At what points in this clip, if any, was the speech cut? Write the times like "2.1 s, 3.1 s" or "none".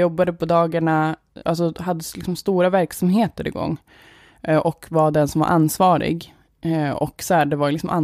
1.4 s